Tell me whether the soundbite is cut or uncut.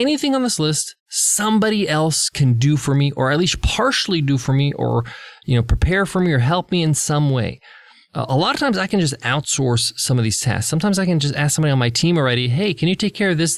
uncut